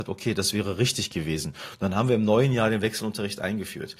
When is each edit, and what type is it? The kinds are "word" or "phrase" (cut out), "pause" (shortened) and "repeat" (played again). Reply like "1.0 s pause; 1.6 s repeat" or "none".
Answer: none

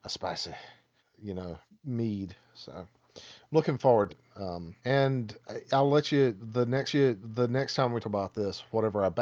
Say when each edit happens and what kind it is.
1.0 s word; 1.7 s pause; 4.1 s word; 4.8 s pause; 6.9 s repeat; 8.0 s word

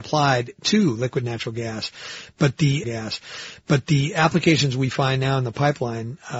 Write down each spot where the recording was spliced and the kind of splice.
2.8 s repeat

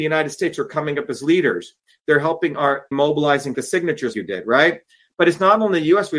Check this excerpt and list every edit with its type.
2.9 s word; 3.5 s word; 4.1 s word

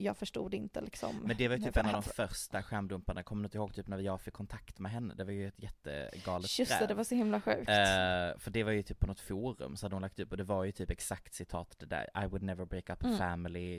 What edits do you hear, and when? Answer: none

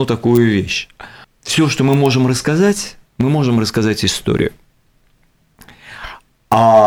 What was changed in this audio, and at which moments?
1.2 s pause; 3.1 s pause

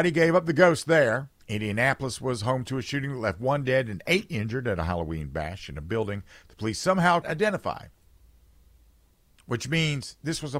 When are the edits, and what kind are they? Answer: 1.4 s pause; 7.2 s word

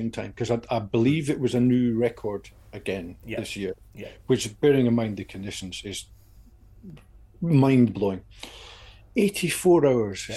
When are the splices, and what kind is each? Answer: none

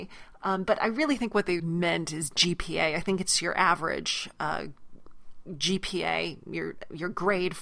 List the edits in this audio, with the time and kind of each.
1.6 s word

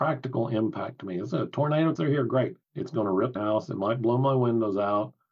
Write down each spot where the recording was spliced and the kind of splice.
2.0 s word; 2.6 s pause; 3.4 s phrase

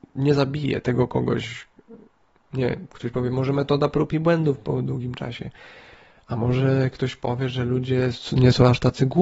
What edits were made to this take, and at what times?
none

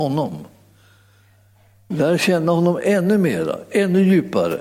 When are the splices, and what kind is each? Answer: none

